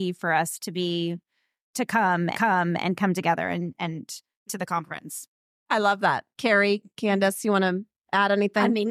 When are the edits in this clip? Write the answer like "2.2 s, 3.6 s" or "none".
2.3 s